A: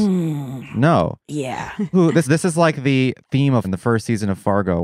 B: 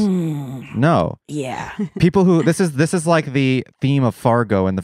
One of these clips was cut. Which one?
A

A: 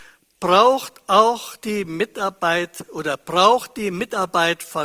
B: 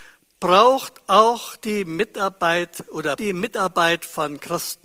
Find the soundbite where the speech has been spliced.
B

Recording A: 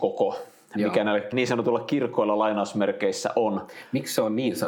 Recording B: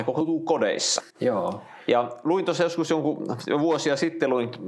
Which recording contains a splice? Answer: B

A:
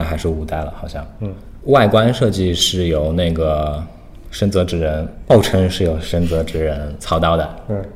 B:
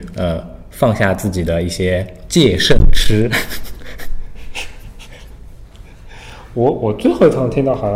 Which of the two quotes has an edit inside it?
A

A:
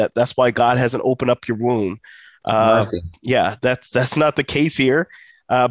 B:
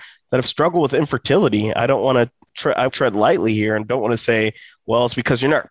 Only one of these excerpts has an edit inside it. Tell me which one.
B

